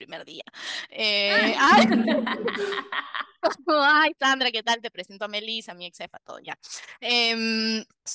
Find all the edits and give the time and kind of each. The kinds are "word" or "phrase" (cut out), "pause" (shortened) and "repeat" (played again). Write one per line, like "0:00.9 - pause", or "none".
none